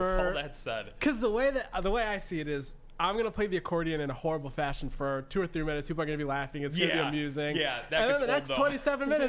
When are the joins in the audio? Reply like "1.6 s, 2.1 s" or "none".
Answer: none